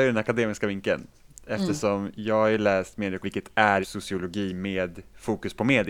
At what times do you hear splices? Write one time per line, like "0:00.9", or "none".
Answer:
0:03.2
0:03.8